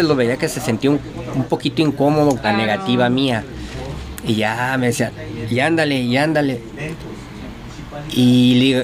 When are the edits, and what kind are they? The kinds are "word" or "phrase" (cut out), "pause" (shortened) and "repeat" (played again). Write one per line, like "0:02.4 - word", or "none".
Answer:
0:02.4 - word